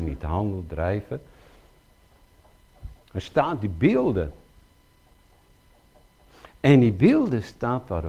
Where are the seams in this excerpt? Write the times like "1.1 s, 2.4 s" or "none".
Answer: 3.0 s

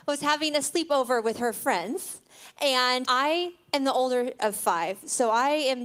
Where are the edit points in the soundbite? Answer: 3.0 s, 4.4 s

